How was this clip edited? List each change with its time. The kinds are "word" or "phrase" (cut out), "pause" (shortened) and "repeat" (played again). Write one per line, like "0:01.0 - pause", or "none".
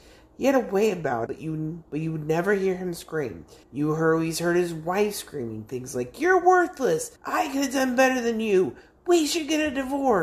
0:01.3 - word
0:01.9 - pause
0:03.6 - pause
0:07.2 - pause